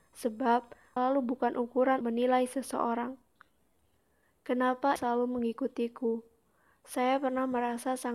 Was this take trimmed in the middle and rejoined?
yes; 3 cuts; at 1.0 s, 2.0 s, 5.0 s

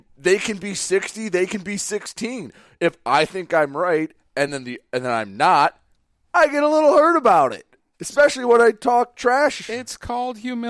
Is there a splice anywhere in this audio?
no; 0 cuts

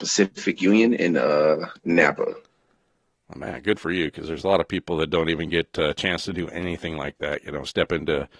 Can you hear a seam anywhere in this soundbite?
no; 0 cuts

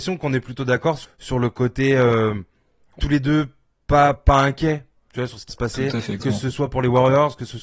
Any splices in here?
yes; 5 cuts; at 1.0 s, 3.0 s, 4.2 s, 5.5 s, 6.2 s

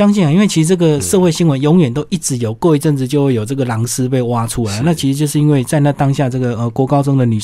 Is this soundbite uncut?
yes; 0 cuts

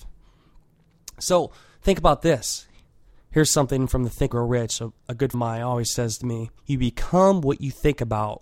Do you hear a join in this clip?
yes; 3 cuts; at 4.3 s, 5.3 s, 6.6 s

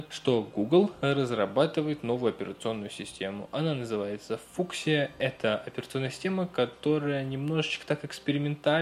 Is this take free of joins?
yes; 0 cuts

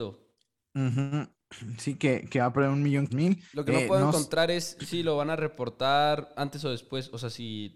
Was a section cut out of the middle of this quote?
yes; 1 cut; at 3.1 s

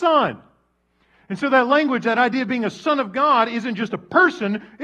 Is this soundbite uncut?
yes; 0 cuts

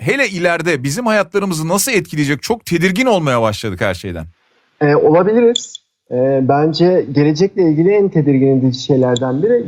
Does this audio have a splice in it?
no; 0 cuts

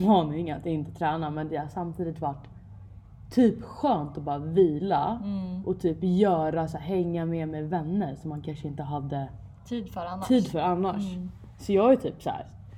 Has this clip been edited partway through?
no; 0 cuts

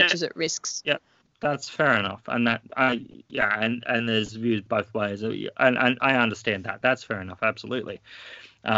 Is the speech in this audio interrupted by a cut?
yes; 1 cut; at 1.2 s

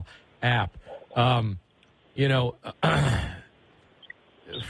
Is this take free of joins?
yes; 0 cuts

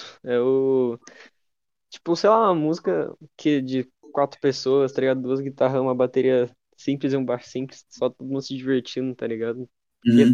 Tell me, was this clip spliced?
no; 0 cuts

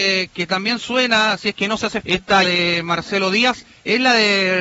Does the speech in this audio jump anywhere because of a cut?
yes; 2 cuts; at 2.0 s, 2.4 s

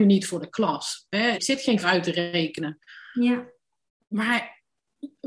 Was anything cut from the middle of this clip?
yes; 2 cuts; at 1.3 s, 1.8 s

